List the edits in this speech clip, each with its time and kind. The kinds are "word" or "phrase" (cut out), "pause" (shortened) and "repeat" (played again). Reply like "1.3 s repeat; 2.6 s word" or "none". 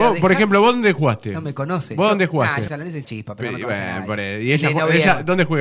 2.7 s phrase; 3.0 s word